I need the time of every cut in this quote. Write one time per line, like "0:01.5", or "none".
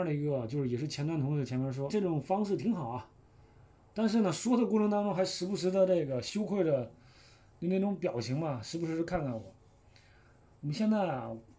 0:01.9